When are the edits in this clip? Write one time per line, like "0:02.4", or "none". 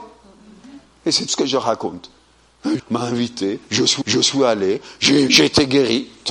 0:01.3
0:02.8
0:04.0
0:05.3